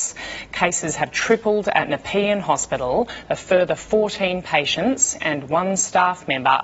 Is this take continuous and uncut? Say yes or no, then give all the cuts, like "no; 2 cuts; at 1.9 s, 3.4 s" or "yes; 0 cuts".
yes; 0 cuts